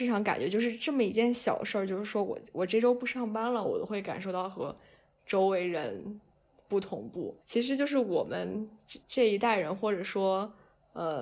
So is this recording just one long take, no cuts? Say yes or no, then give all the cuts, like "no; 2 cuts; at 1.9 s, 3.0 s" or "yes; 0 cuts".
no; 2 cuts; at 7.4 s, 9.0 s